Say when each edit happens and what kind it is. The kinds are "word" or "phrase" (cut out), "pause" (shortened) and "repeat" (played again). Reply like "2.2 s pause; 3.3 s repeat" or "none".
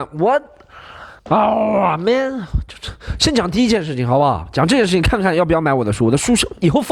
1.2 s pause